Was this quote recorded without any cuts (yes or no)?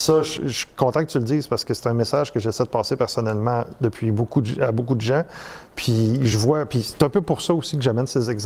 yes